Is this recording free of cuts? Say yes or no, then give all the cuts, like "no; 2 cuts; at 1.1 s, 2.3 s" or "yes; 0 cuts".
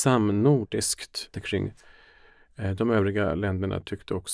no; 1 cut; at 1.3 s